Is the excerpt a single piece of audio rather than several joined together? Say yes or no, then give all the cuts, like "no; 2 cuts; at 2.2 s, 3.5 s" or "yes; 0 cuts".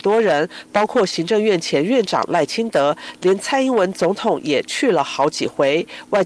yes; 0 cuts